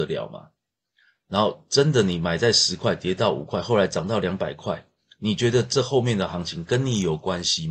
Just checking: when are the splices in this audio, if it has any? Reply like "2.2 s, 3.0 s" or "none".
none